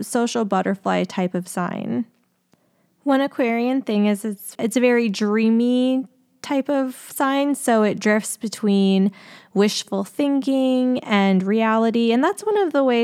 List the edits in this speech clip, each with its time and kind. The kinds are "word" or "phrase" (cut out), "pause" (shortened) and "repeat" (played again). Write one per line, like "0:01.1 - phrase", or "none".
0:04.5 - word